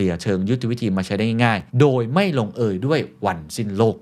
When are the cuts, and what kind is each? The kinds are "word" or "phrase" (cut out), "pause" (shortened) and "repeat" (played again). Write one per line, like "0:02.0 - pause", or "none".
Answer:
0:01.7 - pause